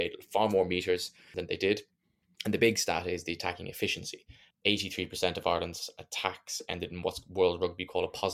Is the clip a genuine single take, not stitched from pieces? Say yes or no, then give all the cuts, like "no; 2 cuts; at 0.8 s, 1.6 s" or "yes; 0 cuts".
yes; 0 cuts